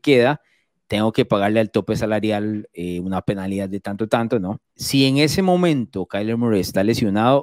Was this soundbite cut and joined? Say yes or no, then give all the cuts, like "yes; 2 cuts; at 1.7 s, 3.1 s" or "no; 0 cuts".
yes; 1 cut; at 4.7 s